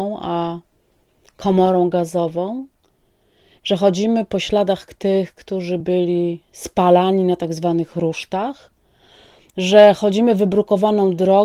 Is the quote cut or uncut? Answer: uncut